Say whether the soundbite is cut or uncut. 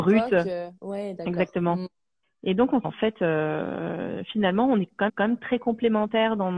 cut